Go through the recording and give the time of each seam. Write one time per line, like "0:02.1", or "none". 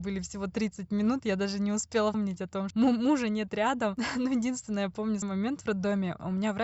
0:02.1
0:02.7
0:05.2